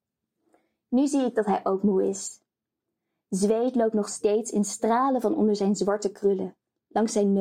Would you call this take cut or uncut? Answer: uncut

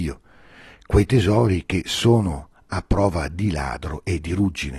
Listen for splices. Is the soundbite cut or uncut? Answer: uncut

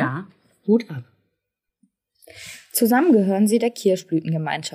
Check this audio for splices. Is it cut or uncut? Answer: uncut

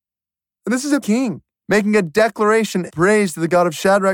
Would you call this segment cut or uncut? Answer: cut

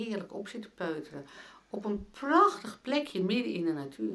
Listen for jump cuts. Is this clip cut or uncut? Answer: uncut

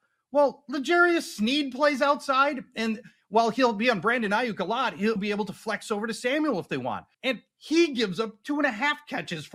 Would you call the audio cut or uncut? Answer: cut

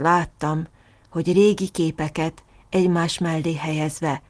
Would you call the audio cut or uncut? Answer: uncut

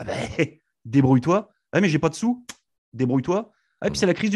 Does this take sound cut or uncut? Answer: uncut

